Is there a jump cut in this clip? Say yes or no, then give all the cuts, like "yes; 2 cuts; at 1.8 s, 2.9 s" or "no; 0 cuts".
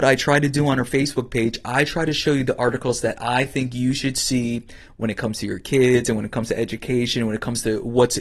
no; 0 cuts